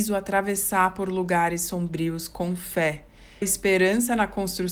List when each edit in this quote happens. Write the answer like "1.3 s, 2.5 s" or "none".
3.4 s